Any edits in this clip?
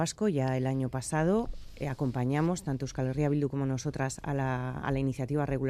no; 0 cuts

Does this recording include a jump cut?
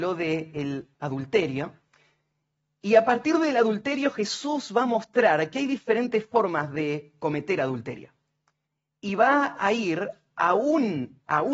no; 0 cuts

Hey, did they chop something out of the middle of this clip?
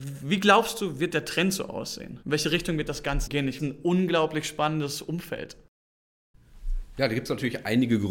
yes; 3 cuts; at 2.2 s, 3.3 s, 3.6 s

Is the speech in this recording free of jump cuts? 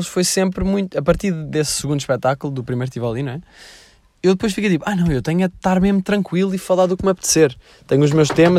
yes; 0 cuts

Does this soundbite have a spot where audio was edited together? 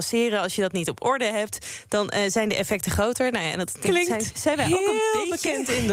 no; 0 cuts

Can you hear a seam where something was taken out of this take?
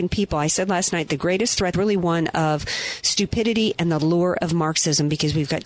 yes; 1 cut; at 1.7 s

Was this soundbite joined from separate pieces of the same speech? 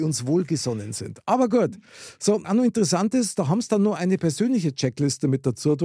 yes; 1 cut; at 2.4 s

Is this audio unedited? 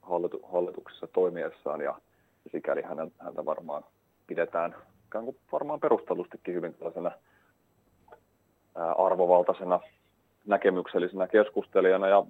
yes; 0 cuts

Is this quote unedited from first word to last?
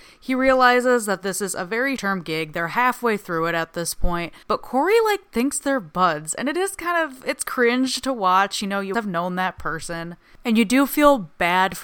no; 3 cuts; at 2.0 s, 4.4 s, 8.9 s

